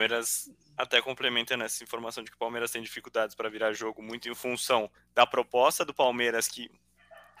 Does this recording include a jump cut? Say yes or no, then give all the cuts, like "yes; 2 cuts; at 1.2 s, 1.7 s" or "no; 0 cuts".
yes; 1 cut; at 4.9 s